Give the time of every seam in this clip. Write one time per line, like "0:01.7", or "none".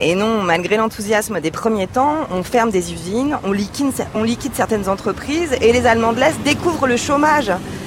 none